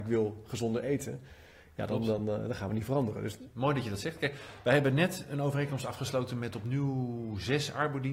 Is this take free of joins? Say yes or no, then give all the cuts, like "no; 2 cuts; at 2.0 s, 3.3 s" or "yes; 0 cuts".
yes; 0 cuts